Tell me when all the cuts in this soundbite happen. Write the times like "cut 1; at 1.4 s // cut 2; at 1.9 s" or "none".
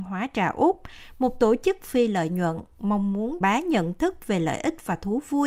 cut 1; at 3.4 s